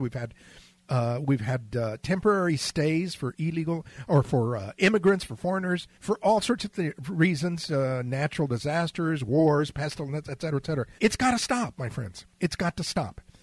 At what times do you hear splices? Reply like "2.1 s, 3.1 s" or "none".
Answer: 5.9 s, 11.0 s, 12.3 s